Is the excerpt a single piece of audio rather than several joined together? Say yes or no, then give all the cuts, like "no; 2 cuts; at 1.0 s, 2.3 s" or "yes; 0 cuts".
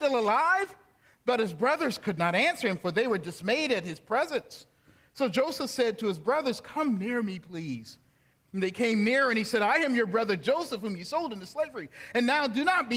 yes; 0 cuts